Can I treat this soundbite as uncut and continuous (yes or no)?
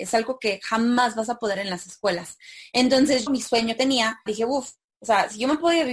no